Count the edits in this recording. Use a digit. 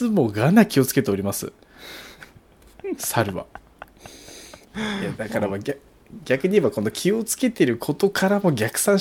1